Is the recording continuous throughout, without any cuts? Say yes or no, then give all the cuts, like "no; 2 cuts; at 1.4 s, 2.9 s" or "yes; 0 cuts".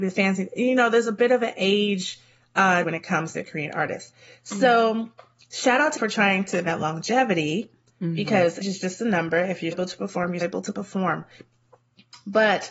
no; 7 cuts; at 2.8 s, 3.3 s, 6.0 s, 6.7 s, 8.6 s, 9.7 s, 10.4 s